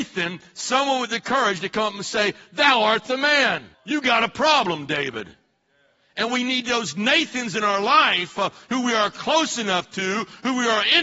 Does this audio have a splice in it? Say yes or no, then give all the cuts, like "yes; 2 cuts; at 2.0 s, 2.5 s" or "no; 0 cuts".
yes; 1 cut; at 3.7 s